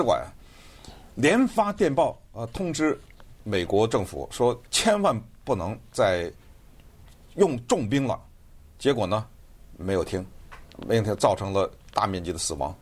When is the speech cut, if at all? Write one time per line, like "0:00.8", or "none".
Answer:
0:04.7